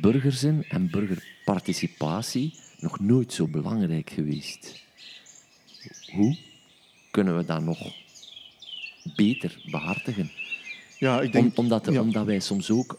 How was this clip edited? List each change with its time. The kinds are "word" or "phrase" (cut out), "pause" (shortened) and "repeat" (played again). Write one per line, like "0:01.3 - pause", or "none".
none